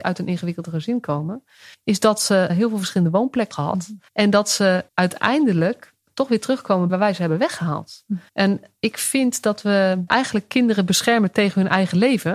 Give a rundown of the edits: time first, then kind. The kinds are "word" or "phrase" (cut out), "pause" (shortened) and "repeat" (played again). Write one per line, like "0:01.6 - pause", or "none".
0:01.7 - pause
0:02.5 - word
0:03.5 - word
0:04.1 - pause
0:04.9 - pause
0:06.9 - phrase
0:08.3 - pause
0:10.1 - word